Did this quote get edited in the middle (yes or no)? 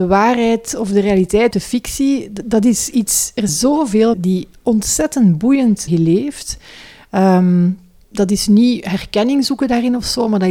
yes